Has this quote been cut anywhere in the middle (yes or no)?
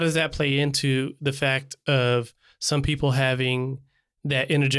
no